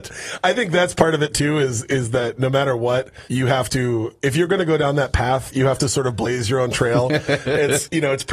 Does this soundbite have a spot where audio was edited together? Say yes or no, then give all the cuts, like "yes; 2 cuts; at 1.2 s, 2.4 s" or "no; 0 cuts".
yes; 1 cut; at 3.3 s